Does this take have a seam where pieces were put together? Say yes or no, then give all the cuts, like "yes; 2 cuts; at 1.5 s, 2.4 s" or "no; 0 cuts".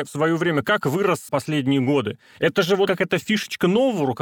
yes; 2 cuts; at 1.3 s, 2.9 s